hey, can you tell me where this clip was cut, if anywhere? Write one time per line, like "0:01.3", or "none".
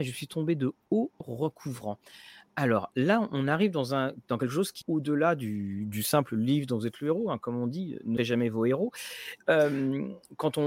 0:01.2
0:04.8
0:08.2